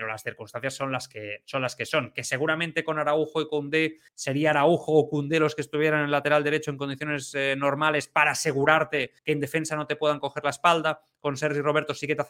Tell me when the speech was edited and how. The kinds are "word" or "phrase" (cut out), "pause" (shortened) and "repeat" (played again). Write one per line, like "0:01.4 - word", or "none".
0:04.1 - pause
0:09.2 - pause